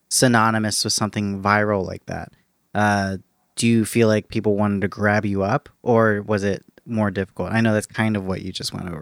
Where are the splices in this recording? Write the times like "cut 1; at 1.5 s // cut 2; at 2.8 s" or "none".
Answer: none